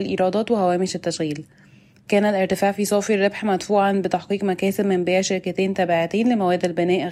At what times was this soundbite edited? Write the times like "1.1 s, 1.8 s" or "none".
none